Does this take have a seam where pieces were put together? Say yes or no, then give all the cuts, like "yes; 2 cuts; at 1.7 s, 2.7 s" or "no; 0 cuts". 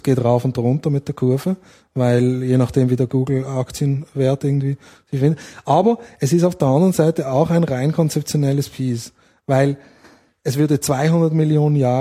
no; 0 cuts